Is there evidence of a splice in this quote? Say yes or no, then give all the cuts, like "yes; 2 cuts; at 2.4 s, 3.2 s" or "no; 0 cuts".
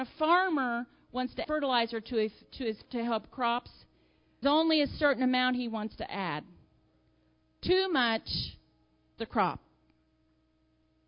yes; 4 cuts; at 1.4 s, 2.9 s, 4.4 s, 9.2 s